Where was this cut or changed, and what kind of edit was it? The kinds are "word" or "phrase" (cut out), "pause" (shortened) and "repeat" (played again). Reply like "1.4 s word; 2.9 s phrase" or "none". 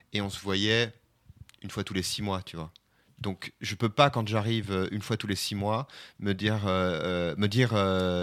none

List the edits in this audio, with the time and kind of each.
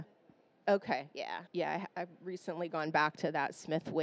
1.5 s pause

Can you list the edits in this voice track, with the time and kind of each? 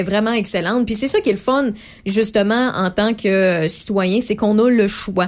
none

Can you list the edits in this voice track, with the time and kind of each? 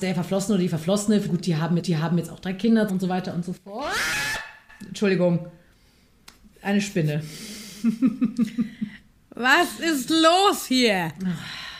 1.3 s phrase; 1.8 s repeat; 2.9 s word

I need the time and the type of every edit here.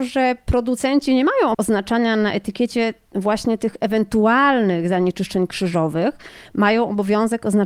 1.5 s word

